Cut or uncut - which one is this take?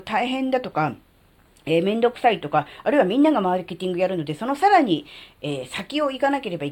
uncut